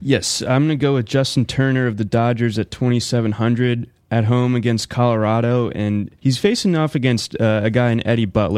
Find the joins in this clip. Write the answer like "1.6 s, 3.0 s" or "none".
6.2 s